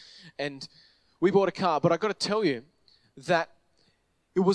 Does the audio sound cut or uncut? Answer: uncut